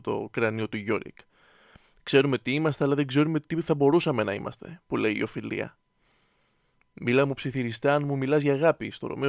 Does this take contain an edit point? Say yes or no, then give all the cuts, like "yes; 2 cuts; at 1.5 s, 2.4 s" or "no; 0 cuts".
no; 0 cuts